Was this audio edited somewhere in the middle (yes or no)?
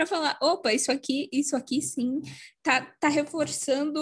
no